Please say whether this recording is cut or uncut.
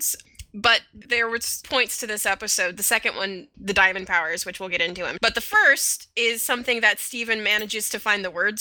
cut